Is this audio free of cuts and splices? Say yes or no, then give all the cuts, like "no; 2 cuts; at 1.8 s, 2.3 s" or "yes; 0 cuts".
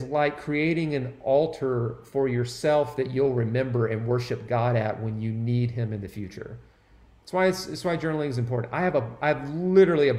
yes; 0 cuts